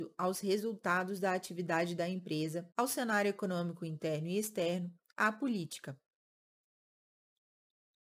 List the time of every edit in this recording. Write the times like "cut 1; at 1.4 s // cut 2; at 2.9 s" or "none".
cut 1; at 2.7 s